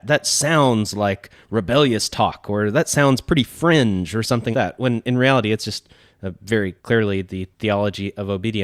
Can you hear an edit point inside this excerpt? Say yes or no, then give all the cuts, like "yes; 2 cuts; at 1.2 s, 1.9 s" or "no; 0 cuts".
yes; 3 cuts; at 4.5 s, 6.8 s, 7.5 s